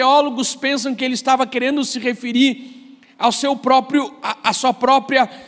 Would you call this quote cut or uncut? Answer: uncut